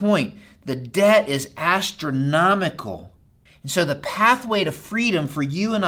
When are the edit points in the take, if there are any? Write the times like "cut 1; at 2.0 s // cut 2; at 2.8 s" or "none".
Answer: cut 1; at 3.5 s